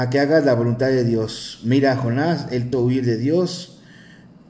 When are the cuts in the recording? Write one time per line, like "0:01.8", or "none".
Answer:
0:02.7

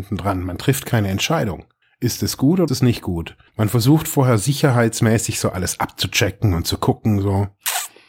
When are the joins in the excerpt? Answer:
0:01.8
0:02.7
0:03.5

